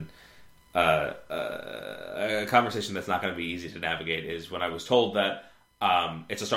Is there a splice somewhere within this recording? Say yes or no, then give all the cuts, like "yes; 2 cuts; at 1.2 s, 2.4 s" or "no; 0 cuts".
no; 0 cuts